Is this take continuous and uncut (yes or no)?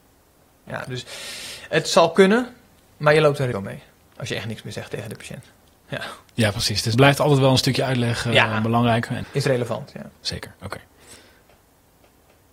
no